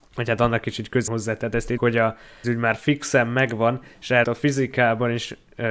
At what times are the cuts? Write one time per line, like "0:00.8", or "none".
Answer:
0:01.1
0:01.8
0:02.4
0:04.2